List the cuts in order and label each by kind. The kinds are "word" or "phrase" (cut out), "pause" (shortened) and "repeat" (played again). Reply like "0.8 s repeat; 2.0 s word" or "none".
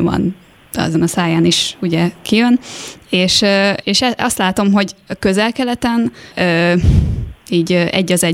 0.9 s word; 3.8 s word; 6.3 s phrase